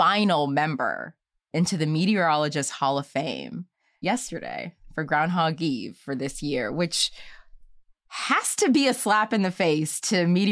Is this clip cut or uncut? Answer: uncut